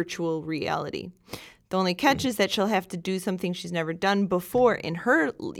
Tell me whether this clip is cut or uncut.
uncut